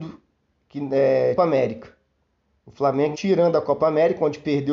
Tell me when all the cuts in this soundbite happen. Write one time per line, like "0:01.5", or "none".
0:01.4
0:03.1